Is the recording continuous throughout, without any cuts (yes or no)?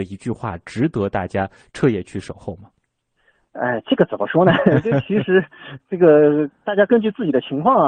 yes